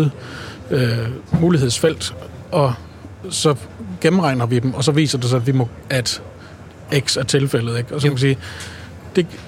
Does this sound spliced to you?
yes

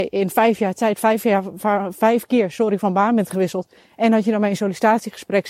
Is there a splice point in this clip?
no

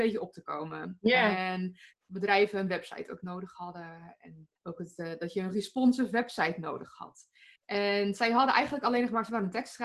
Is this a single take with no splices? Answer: no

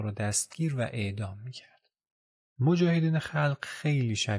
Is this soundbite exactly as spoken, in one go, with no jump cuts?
yes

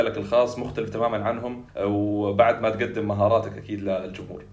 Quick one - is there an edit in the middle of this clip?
yes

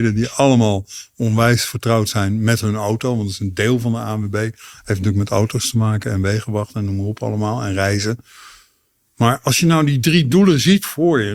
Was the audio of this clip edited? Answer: no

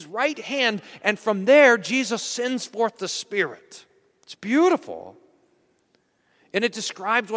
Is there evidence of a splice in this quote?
no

